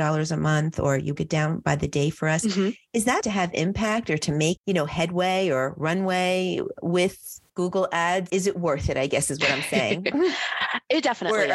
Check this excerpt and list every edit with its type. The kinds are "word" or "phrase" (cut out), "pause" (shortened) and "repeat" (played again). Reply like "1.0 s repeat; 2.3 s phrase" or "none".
1.2 s word; 3.2 s word; 4.6 s word; 7.5 s pause; 8.3 s word